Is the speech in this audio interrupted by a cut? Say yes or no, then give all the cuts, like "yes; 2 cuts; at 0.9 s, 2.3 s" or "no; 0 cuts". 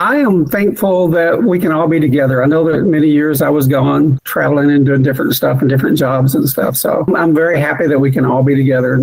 no; 0 cuts